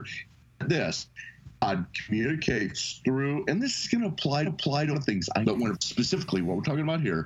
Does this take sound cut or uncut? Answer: cut